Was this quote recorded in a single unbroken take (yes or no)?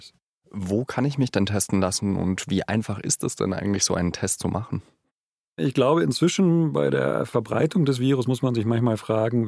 yes